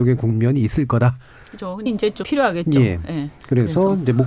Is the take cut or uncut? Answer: cut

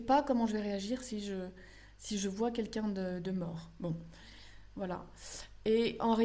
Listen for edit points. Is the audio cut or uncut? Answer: uncut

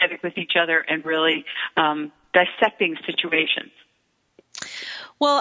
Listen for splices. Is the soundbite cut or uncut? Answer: uncut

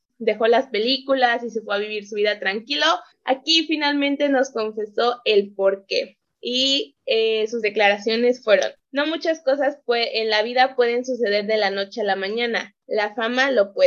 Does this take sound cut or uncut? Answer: uncut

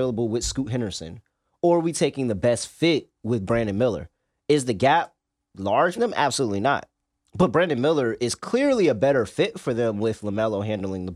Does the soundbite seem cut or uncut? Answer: cut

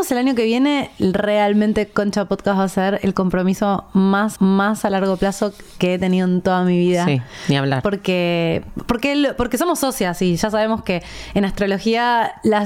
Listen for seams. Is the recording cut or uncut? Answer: cut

